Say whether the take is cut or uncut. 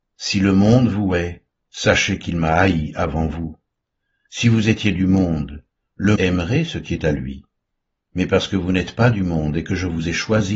cut